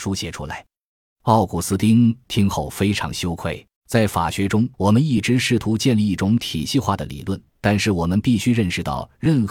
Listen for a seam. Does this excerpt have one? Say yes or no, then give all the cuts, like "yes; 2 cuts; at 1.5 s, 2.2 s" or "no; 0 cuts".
yes; 3 cuts; at 3.8 s, 4.7 s, 7.5 s